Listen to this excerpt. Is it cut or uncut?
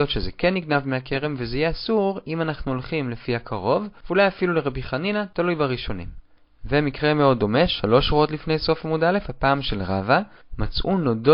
uncut